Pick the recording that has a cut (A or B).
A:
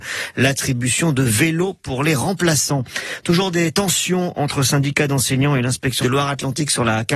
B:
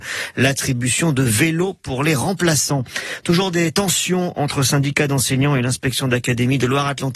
A